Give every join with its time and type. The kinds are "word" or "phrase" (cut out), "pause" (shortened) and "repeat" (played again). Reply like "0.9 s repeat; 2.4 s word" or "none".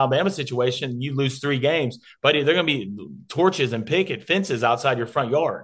none